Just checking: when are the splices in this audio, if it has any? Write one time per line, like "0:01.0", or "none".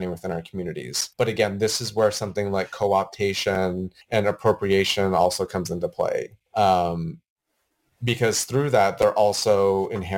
0:01.1
0:04.0
0:06.5